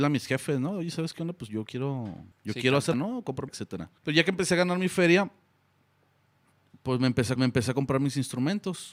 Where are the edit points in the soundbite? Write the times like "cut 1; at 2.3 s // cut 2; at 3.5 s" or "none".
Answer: cut 1; at 2.3 s // cut 2; at 2.9 s // cut 3; at 3.5 s // cut 4; at 4.0 s // cut 5; at 7.4 s